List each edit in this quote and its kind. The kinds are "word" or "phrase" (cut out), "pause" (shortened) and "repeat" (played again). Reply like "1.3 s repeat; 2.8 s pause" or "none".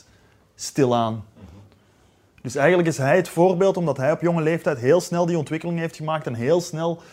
none